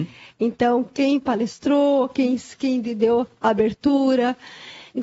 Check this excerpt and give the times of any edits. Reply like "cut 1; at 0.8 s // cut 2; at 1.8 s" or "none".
none